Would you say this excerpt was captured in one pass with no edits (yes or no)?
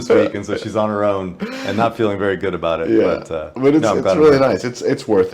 yes